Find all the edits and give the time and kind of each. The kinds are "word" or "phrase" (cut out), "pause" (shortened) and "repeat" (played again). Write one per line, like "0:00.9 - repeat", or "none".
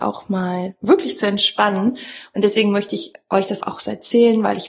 0:03.6 - word